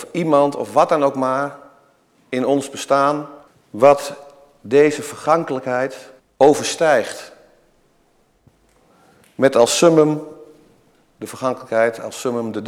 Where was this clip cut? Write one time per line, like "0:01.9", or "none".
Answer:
0:03.5
0:06.2

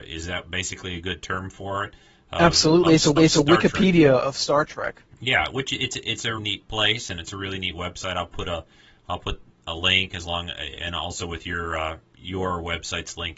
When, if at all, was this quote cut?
0:03.2
0:06.4

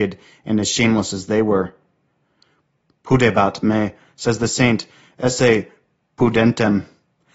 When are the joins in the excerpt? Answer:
none

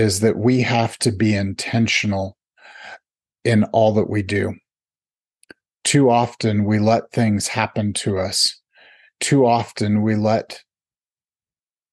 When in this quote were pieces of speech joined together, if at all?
none

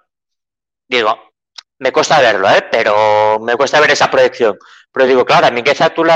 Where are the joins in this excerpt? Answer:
none

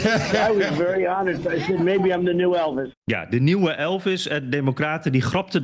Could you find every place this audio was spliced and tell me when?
0:02.9

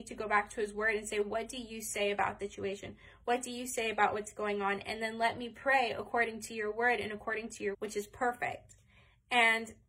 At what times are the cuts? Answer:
0:02.4
0:07.7

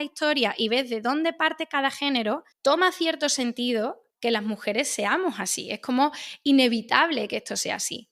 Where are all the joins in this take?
0:02.5
0:04.1

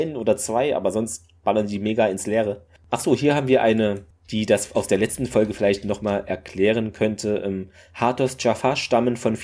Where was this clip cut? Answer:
none

